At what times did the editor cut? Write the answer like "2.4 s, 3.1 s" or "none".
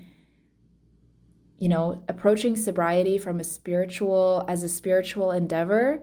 none

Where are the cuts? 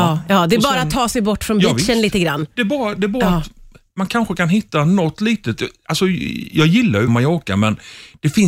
7.1 s

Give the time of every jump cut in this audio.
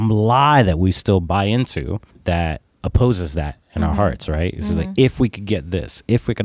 2.1 s

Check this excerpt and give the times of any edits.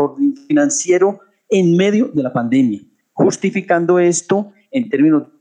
none

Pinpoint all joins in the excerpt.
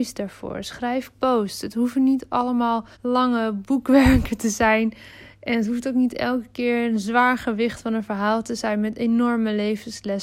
1.1 s, 2.9 s

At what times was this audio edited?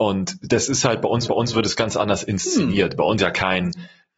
1.3 s, 3.2 s

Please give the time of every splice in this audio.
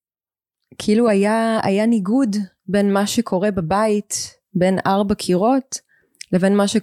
none

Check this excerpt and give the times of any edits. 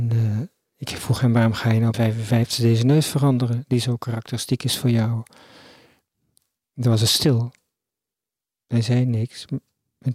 1.9 s

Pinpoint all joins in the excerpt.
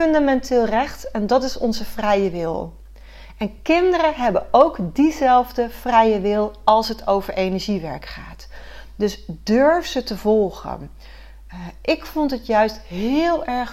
none

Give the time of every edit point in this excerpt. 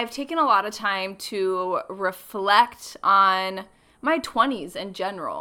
none

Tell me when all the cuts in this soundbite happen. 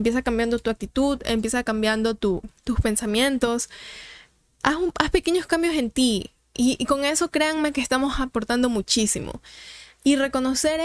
none

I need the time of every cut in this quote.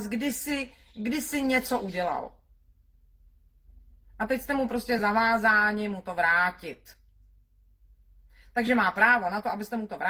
none

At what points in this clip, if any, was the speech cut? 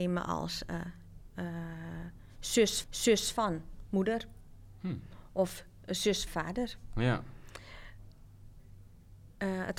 2.8 s, 6.3 s

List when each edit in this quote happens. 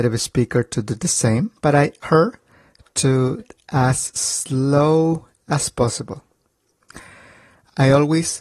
1.6 s, 2.0 s, 3.4 s

